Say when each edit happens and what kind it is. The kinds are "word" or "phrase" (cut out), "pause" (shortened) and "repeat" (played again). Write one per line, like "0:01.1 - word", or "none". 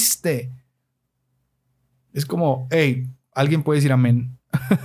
none

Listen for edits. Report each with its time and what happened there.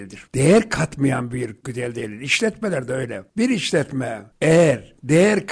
0:01.6 - word

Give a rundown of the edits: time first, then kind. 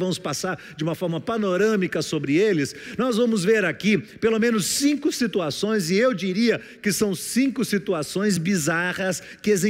none

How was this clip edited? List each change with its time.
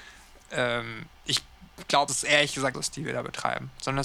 0:01.1 - pause
0:02.1 - phrase
0:02.7 - phrase

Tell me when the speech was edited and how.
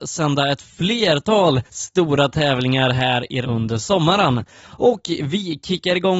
0:01.7 - pause
0:03.4 - word

